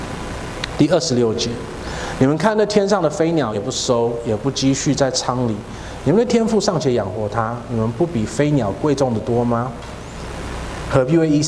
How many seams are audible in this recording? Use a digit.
1